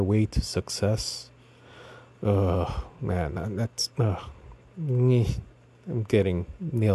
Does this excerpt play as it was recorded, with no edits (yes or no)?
yes